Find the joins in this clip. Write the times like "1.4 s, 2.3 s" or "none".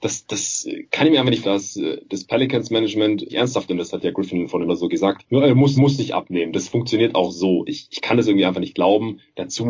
1.4 s, 3.3 s, 3.7 s, 4.7 s, 5.8 s